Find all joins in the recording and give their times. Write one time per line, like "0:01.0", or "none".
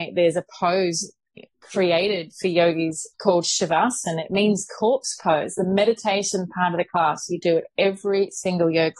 0:01.5
0:03.1